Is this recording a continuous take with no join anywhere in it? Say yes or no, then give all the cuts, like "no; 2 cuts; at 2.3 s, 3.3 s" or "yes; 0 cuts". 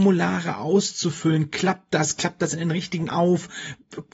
no; 1 cut; at 3.1 s